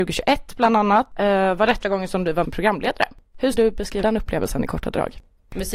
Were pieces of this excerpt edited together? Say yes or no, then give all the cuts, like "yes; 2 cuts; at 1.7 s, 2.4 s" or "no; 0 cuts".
yes; 4 cuts; at 1.8 s, 2.4 s, 3.5 s, 4.0 s